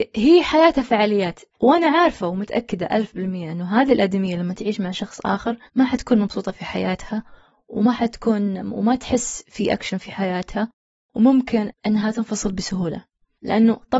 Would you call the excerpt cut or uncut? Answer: cut